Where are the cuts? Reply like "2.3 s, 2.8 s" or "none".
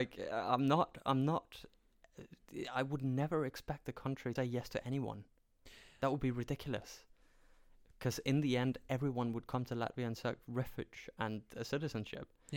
4.4 s